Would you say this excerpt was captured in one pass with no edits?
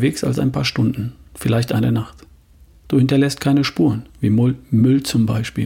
no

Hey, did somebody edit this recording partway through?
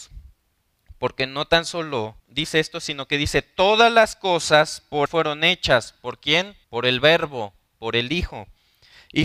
yes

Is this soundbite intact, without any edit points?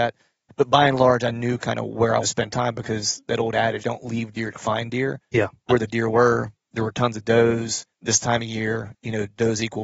no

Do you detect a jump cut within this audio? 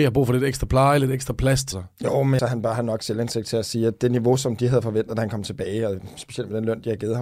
yes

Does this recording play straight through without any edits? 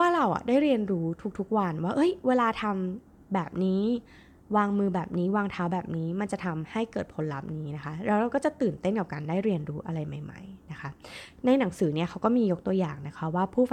yes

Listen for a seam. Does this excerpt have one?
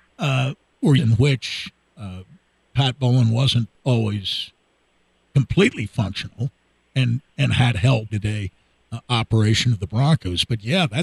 yes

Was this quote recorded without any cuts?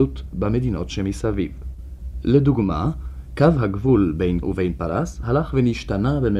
no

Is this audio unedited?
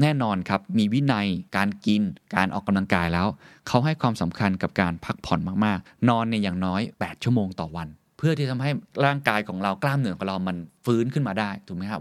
no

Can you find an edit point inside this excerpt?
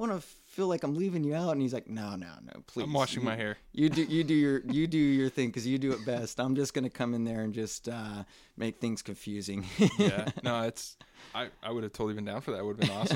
no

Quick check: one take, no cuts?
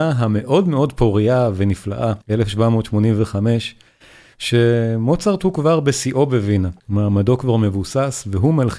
no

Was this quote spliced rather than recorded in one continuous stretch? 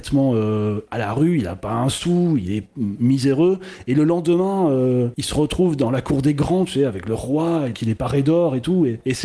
yes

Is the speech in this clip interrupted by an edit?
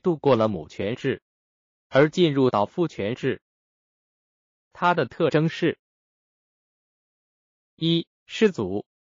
no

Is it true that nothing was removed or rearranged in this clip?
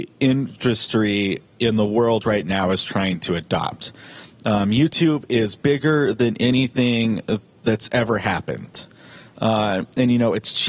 yes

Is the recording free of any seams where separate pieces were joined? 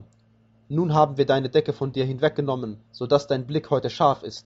no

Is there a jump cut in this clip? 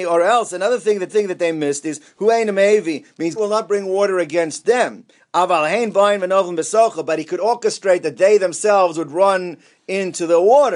yes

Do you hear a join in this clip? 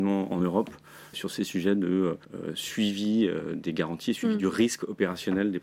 yes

